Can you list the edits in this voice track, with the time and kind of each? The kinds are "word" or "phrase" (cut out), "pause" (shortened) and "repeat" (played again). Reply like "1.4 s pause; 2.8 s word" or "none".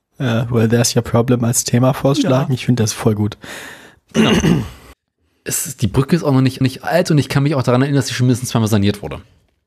4.9 s pause; 6.6 s repeat